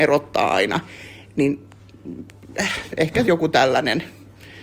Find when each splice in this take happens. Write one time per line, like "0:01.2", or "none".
0:03.2